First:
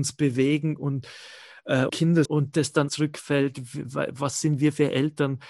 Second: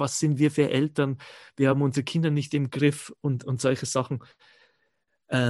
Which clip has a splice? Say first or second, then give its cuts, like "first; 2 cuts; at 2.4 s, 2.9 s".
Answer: first; 3 cuts; at 1.9 s, 2.2 s, 2.9 s